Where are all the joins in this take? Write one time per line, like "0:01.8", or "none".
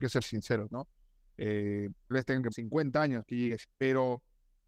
0:02.1
0:02.5
0:03.3
0:03.6